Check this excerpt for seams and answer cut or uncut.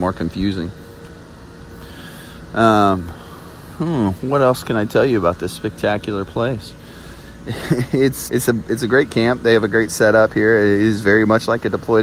cut